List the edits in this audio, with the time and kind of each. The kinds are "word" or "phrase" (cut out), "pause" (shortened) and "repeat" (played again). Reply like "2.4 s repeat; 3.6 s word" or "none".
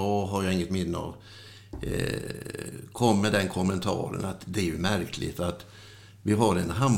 none